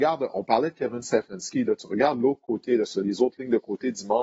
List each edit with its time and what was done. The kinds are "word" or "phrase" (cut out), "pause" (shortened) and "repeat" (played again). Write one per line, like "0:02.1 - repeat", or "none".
none